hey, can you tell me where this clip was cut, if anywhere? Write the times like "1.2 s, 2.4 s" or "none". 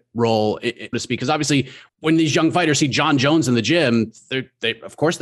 0.9 s, 1.9 s